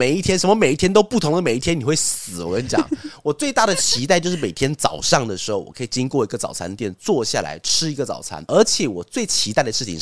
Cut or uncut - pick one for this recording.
uncut